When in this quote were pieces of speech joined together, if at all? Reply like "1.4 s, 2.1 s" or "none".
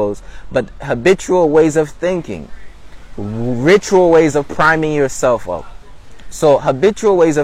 none

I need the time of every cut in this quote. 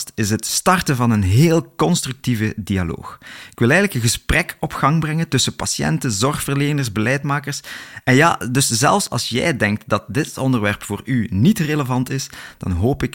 none

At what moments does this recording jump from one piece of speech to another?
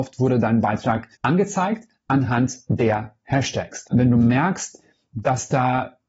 1.1 s

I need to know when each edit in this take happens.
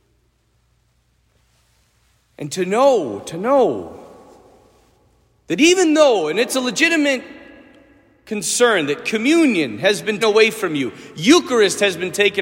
10.2 s

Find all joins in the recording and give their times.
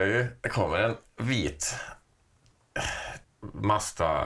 3.2 s

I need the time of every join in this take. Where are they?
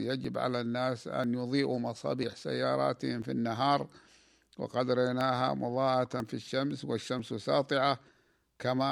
none

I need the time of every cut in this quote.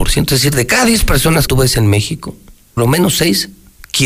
1.5 s, 2.8 s

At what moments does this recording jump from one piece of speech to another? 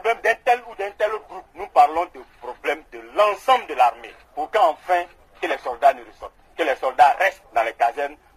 none

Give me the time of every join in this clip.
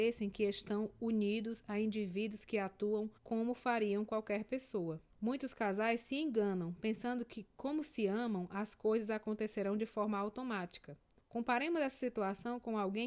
3.2 s, 5.1 s, 11.2 s

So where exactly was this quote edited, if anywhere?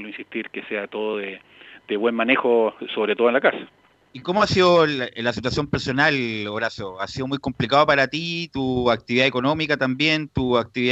3.9 s

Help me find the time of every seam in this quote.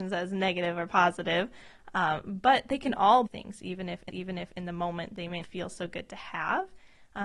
3.3 s, 4.1 s, 5.4 s

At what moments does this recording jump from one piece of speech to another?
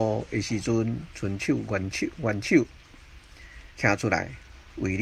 3.7 s

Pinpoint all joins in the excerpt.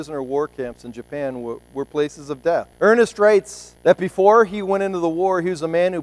2.7 s, 3.8 s

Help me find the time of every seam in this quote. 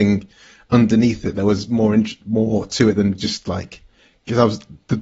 none

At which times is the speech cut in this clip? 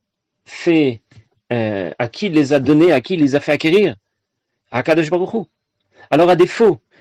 none

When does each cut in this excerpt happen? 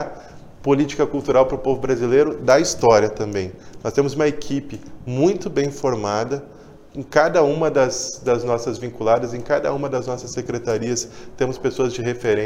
none

